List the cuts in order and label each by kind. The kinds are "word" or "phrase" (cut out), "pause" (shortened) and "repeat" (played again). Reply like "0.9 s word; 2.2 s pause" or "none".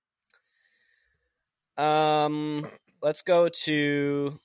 none